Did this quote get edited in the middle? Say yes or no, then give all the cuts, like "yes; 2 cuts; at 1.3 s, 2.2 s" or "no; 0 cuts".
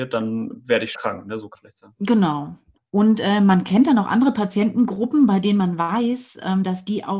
yes; 3 cuts; at 0.9 s, 1.5 s, 2.8 s